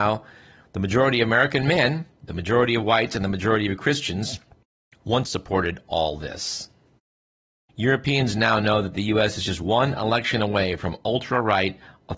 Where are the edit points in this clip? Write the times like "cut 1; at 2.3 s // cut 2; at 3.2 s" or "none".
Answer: cut 1; at 5.3 s